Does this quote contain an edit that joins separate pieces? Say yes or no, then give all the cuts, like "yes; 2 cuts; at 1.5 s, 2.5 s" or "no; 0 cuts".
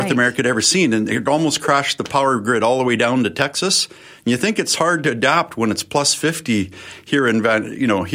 no; 0 cuts